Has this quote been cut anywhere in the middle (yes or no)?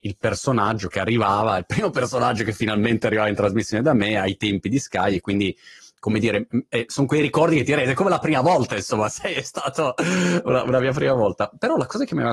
no